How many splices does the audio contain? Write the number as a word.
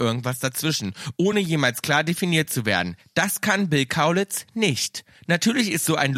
zero